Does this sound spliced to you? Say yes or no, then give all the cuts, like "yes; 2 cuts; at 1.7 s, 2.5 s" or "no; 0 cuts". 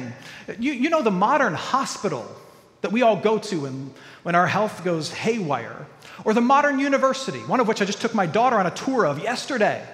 no; 0 cuts